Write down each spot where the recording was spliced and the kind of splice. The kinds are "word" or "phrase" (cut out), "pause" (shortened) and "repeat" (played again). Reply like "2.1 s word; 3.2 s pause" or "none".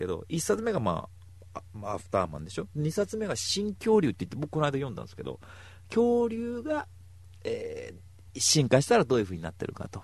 none